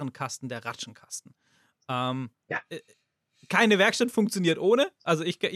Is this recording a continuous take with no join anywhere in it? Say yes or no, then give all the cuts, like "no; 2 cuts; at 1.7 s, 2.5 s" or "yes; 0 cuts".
yes; 0 cuts